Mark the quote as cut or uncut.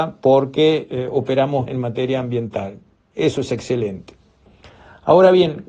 cut